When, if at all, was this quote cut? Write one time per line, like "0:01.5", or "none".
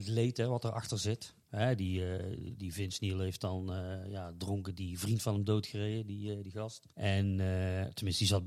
0:01.4
0:06.9